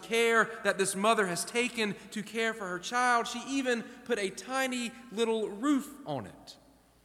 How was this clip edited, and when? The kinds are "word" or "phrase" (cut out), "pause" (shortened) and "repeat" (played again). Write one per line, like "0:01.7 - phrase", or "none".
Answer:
none